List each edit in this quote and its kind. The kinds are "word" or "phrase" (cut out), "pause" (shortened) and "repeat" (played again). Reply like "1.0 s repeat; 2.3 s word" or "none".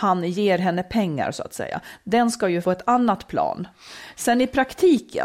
2.6 s word